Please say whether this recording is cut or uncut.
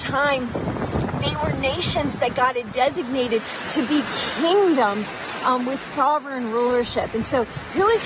uncut